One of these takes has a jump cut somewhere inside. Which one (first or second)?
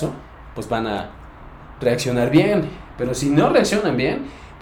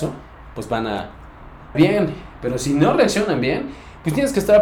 second